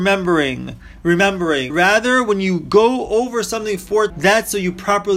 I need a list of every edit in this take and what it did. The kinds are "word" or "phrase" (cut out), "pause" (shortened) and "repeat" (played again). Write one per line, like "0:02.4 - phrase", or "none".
0:01.7 - word
0:04.1 - word